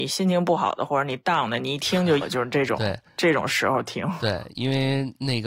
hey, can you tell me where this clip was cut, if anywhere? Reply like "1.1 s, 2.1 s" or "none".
2.2 s